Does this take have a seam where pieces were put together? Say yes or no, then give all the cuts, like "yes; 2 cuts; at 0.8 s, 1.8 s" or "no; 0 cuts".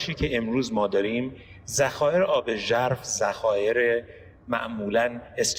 no; 0 cuts